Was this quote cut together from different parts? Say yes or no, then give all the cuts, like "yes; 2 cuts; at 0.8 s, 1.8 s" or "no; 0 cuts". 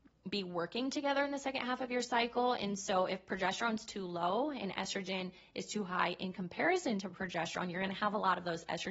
no; 0 cuts